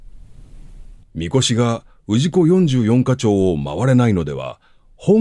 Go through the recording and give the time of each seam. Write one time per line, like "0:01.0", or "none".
0:01.0